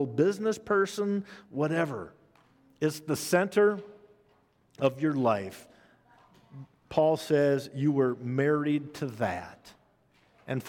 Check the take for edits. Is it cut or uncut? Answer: uncut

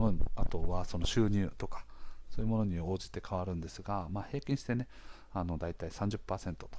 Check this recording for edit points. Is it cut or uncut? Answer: uncut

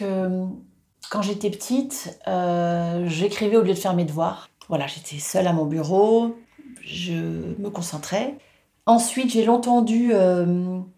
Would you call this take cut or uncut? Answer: uncut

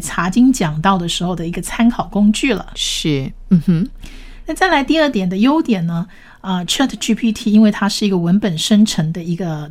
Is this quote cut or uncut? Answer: uncut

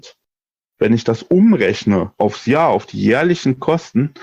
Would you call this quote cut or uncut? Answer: uncut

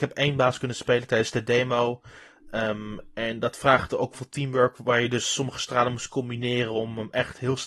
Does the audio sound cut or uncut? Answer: cut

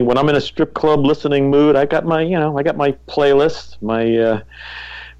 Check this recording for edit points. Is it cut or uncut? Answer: uncut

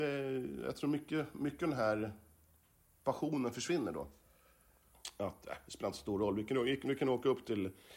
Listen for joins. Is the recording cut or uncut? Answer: uncut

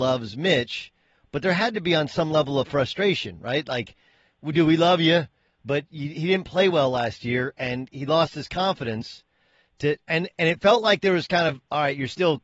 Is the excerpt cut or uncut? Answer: uncut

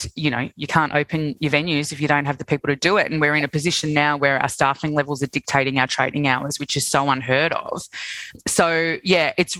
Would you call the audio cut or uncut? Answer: uncut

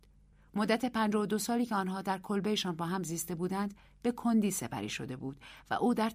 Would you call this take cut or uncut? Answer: uncut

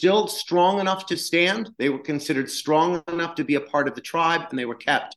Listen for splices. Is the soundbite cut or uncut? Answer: cut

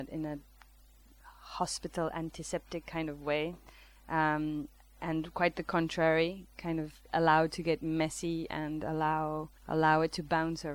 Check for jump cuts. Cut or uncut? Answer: cut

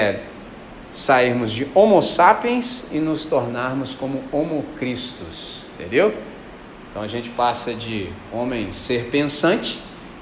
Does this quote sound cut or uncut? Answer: uncut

